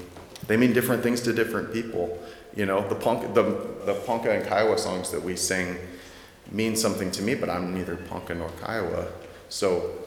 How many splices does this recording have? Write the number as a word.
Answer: one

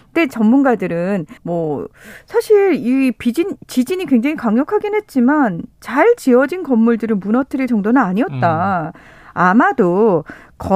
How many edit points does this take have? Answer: one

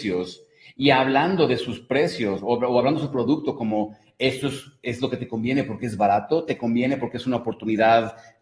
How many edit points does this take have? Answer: zero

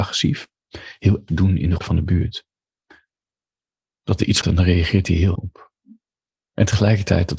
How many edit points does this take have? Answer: four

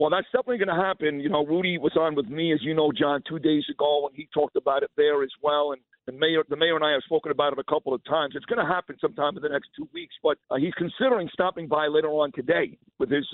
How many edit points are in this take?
one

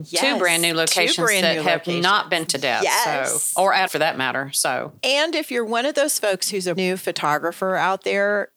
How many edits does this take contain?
three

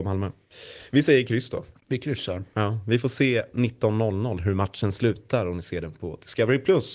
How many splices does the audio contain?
one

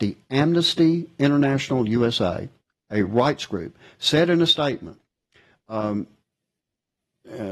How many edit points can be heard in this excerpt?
zero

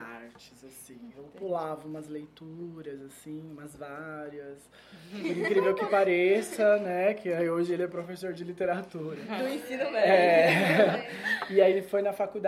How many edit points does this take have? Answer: zero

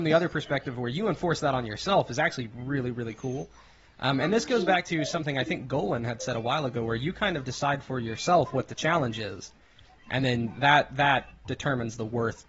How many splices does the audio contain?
zero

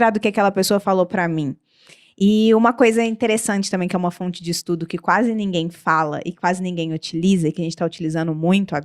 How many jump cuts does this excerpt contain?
zero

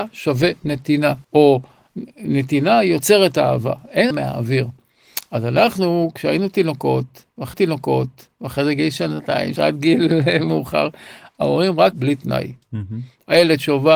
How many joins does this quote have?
five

